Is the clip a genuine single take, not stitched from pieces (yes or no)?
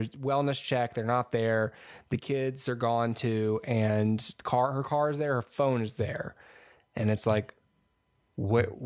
yes